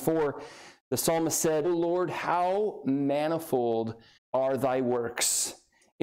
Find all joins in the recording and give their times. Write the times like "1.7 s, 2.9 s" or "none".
1.6 s, 4.2 s